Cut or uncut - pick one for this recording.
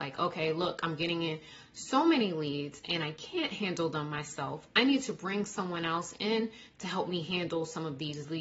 uncut